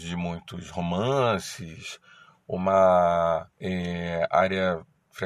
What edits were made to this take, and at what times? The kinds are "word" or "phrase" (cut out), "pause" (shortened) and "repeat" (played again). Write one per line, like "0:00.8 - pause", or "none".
0:03.5 - pause